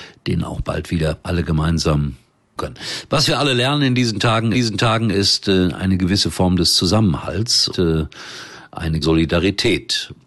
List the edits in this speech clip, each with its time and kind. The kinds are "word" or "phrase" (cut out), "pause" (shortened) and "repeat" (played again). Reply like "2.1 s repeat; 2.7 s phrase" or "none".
1.2 s pause; 2.6 s word; 4.5 s repeat; 7.7 s word; 9.0 s phrase